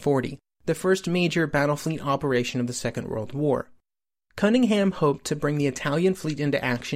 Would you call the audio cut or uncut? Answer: uncut